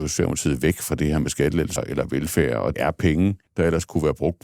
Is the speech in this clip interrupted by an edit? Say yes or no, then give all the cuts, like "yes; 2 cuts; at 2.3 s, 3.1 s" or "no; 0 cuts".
yes; 3 cuts; at 1.8 s, 2.7 s, 3.5 s